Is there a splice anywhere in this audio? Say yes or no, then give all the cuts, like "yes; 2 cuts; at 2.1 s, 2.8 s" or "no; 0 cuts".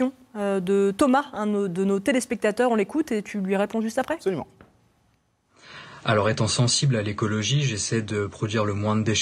no; 0 cuts